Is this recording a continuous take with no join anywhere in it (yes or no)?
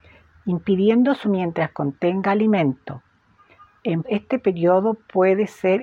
no